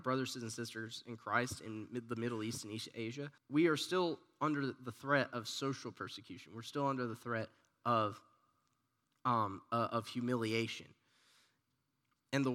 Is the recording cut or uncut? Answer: cut